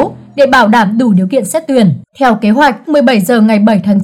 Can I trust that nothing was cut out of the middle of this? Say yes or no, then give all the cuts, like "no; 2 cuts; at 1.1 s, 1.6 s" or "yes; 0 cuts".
no; 2 cuts; at 2.1 s, 2.9 s